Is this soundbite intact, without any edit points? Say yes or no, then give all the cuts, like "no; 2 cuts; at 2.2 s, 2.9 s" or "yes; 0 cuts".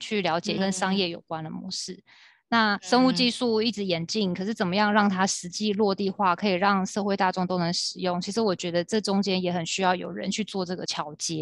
yes; 0 cuts